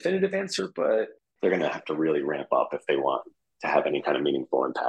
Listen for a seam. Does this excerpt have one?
no; 0 cuts

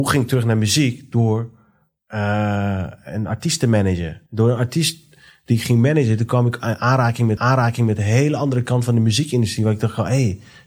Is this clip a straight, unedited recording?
no; 2 cuts; at 4.3 s, 7.4 s

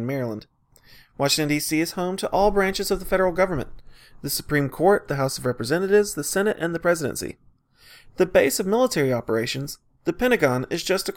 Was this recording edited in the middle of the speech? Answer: no; 0 cuts

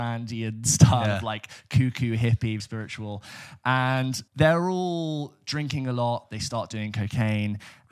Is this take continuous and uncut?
no; 2 cuts; at 2.6 s, 4.3 s

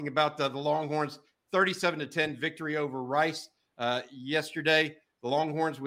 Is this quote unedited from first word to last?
yes; 0 cuts

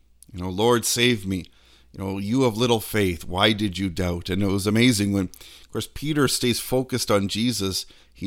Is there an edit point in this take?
no; 0 cuts

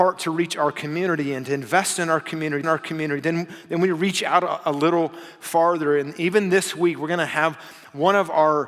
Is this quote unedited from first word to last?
no; 1 cut; at 2.6 s

